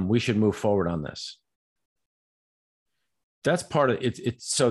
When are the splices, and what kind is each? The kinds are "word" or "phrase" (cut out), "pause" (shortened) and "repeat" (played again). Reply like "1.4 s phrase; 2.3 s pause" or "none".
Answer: none